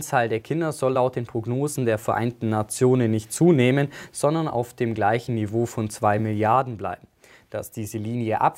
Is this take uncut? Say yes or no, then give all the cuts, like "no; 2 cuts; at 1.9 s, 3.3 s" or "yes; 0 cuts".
yes; 0 cuts